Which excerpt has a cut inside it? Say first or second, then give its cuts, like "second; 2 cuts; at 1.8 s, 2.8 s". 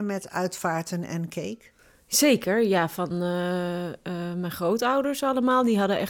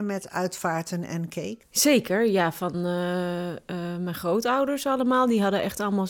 second; 1 cut; at 1.6 s